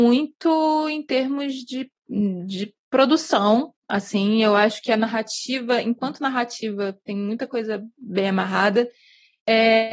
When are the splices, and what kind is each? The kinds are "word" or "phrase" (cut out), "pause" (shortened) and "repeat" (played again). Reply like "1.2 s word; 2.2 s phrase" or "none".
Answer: 3.8 s pause